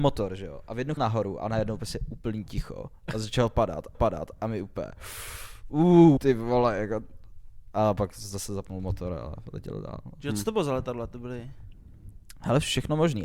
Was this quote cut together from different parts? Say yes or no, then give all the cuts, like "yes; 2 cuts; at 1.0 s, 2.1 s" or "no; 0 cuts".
yes; 3 cuts; at 1.0 s, 3.9 s, 6.2 s